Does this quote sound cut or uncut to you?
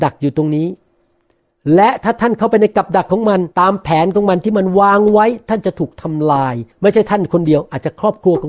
cut